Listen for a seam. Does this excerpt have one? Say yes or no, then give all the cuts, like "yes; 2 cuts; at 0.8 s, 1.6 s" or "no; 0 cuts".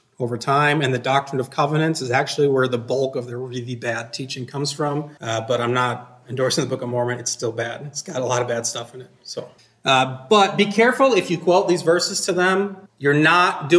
yes; 3 cuts; at 5.2 s, 9.6 s, 12.9 s